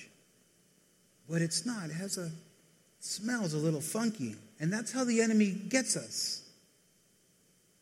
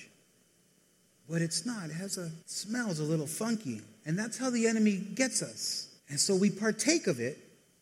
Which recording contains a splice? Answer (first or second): second